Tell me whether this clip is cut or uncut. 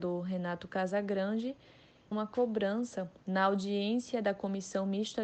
cut